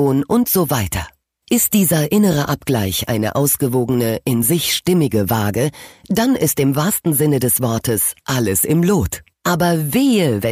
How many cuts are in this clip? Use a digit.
0